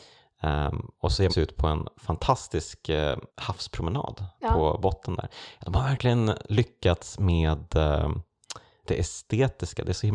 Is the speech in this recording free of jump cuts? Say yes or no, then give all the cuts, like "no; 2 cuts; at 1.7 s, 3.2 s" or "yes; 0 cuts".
no; 3 cuts; at 1.3 s, 3.3 s, 8.8 s